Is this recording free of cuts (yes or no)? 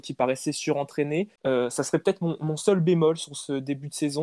no